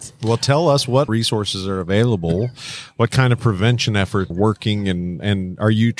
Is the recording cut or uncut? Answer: cut